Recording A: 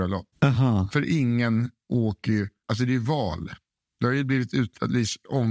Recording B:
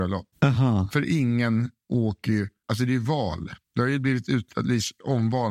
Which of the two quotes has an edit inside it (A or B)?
B